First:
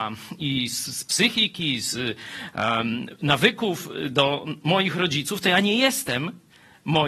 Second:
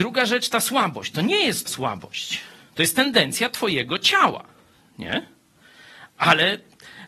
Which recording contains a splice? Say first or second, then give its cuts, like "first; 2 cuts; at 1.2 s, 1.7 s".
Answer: second; 1 cut; at 1.7 s